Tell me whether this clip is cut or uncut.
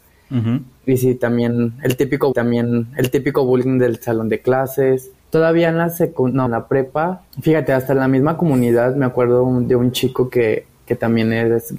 cut